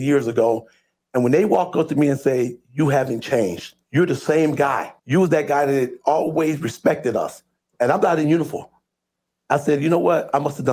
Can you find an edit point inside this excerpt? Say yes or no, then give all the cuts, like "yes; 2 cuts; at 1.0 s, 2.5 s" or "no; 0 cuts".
yes; 2 cuts; at 3.8 s, 5.0 s